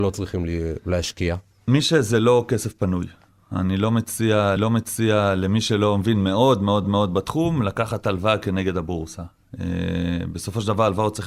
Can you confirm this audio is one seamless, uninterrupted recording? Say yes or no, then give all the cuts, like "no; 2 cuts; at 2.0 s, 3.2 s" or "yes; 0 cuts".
no; 3 cuts; at 1.5 s, 4.6 s, 6.8 s